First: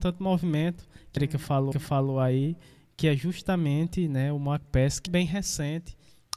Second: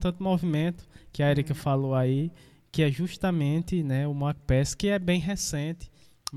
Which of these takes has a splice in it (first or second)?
first